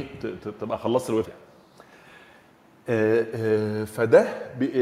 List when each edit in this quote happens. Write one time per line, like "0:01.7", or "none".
0:01.2